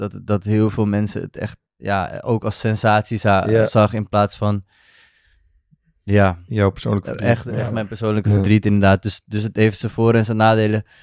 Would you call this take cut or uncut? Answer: cut